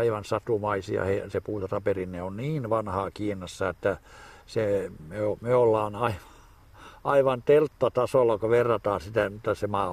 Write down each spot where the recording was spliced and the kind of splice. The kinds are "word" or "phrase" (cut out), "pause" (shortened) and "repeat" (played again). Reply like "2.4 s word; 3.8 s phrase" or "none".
none

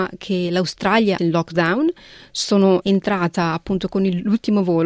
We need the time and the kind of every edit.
1.2 s word; 2.8 s word

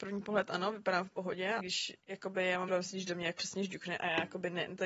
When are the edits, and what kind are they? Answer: 1.6 s word; 2.0 s pause; 2.7 s word; 3.4 s word

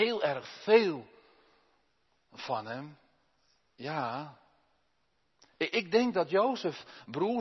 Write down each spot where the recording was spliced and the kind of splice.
none

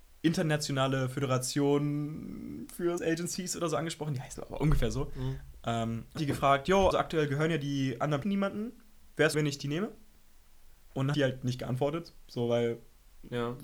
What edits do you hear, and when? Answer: 3.0 s word; 4.3 s word; 6.2 s word; 6.9 s word; 8.2 s word; 9.3 s word; 11.1 s word

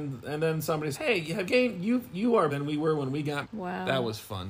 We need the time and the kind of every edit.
0.9 s word; 1.5 s word; 2.5 s word; 3.4 s word

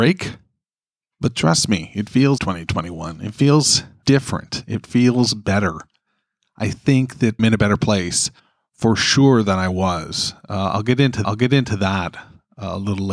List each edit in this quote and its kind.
2.4 s word; 4.0 s word; 7.4 s phrase; 8.4 s pause; 11.2 s repeat

